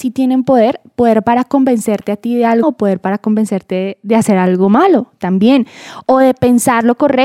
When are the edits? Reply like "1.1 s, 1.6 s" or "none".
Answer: 2.6 s